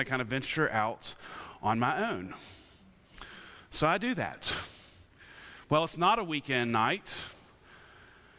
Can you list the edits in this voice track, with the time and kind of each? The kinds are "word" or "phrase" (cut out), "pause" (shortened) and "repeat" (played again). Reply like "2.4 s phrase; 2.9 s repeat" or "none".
none